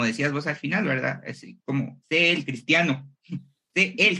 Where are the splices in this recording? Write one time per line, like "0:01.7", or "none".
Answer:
0:02.0